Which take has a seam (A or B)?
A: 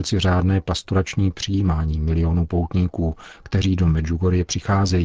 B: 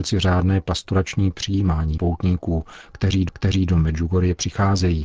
B